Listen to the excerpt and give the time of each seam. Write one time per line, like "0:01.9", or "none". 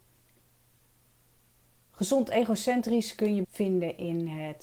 0:03.4